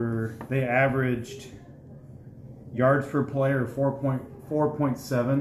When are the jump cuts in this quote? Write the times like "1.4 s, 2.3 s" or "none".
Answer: none